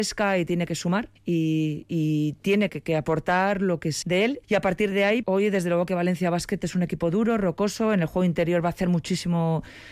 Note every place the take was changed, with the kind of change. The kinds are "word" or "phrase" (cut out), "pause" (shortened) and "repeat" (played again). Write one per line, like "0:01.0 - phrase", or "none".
0:01.2 - pause
0:02.7 - word
0:04.0 - word
0:04.4 - pause
0:04.9 - word
0:05.2 - word